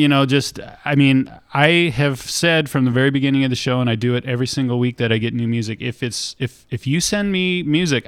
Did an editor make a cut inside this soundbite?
no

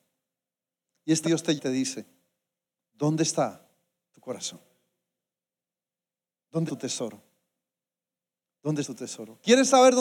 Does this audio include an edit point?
yes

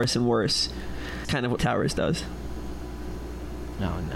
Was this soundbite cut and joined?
yes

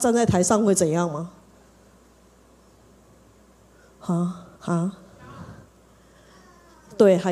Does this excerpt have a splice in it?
yes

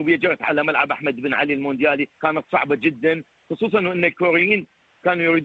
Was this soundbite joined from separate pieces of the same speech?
yes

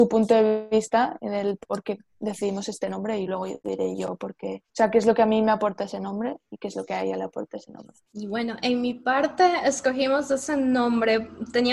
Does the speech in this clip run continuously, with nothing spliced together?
no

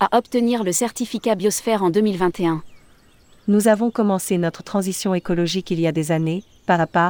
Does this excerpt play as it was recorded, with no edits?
yes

